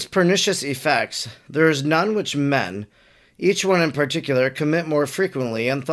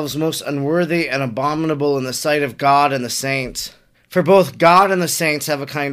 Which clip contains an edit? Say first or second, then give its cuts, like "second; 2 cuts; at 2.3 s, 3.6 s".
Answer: second; 1 cut; at 3.9 s